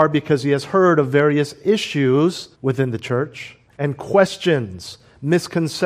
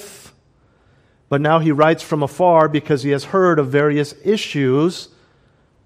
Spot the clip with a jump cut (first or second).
first